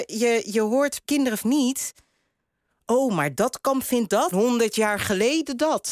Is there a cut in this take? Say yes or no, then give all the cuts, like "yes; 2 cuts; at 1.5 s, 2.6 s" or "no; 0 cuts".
yes; 3 cuts; at 1.0 s, 1.4 s, 4.3 s